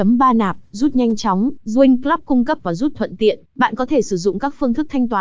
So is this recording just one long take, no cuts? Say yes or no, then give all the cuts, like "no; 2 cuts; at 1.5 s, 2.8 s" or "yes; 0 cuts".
no; 4 cuts; at 1.6 s, 2.6 s, 2.9 s, 3.5 s